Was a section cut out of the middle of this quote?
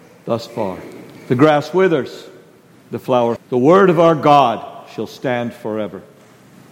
yes; 1 cut; at 3.4 s

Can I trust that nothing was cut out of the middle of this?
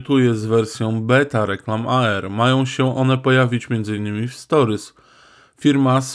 yes; 0 cuts

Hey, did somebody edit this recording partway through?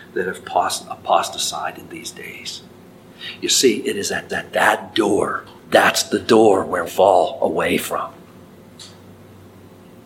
yes; 3 cuts; at 4.3 s, 5.6 s, 6.9 s

